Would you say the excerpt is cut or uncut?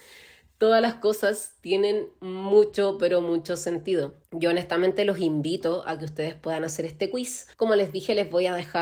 cut